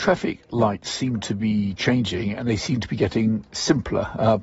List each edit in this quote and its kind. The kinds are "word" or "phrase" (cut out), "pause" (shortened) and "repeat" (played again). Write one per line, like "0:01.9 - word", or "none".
none